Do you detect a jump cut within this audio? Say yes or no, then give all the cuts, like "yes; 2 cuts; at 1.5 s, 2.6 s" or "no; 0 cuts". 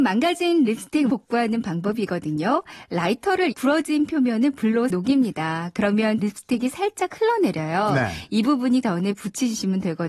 yes; 5 cuts; at 1.1 s, 3.5 s, 4.9 s, 6.2 s, 8.8 s